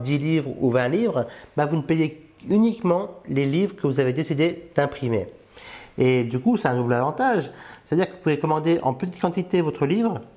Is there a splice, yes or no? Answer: no